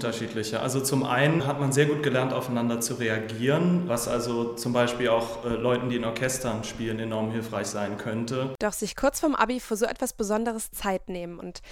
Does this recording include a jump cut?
no; 0 cuts

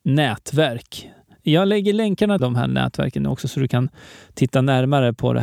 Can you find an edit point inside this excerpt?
yes; 1 cut; at 2.4 s

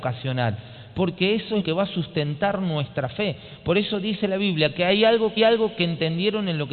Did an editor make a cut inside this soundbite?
yes; 2 cuts; at 1.6 s, 5.4 s

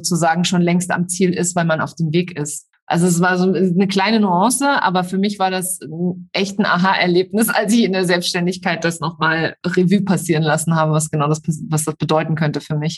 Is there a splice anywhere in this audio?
no; 0 cuts

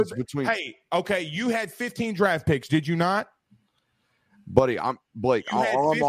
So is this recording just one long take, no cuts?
yes; 0 cuts

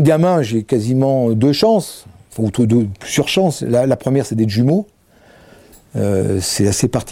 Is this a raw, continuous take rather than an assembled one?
yes; 0 cuts

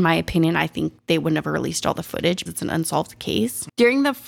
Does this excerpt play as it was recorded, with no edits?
no; 1 cut; at 2.5 s

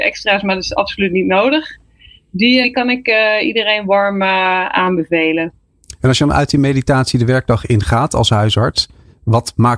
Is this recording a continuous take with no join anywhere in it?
no; 1 cut; at 2.6 s

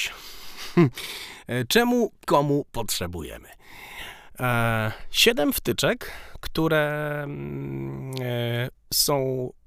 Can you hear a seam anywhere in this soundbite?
yes; 1 cut; at 2.2 s

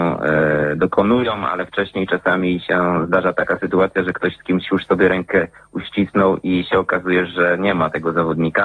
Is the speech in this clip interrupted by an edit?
no; 0 cuts

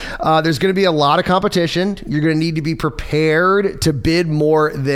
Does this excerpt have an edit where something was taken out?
no; 0 cuts

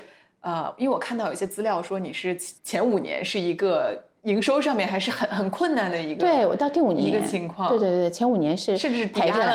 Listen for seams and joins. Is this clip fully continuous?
no; 1 cut; at 2.6 s

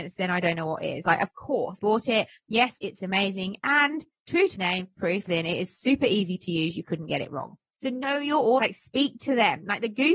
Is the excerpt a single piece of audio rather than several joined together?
no; 5 cuts; at 1.8 s, 4.6 s, 5.0 s, 5.3 s, 8.6 s

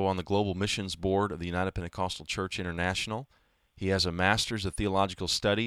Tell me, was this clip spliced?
no; 0 cuts

